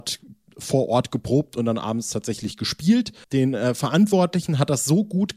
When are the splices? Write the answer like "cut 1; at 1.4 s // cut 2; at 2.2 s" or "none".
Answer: cut 1; at 3.2 s